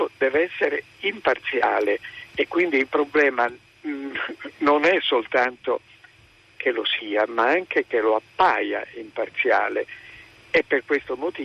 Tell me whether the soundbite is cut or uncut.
uncut